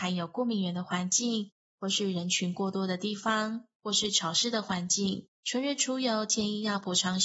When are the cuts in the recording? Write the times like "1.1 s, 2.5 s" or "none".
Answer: 5.3 s